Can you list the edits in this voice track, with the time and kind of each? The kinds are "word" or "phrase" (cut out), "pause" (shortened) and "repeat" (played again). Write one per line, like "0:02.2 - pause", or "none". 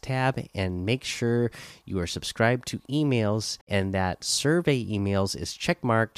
0:03.6 - pause